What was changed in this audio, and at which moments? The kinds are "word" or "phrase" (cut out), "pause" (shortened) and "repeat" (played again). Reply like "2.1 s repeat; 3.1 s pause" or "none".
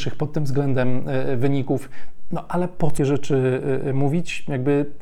3.0 s word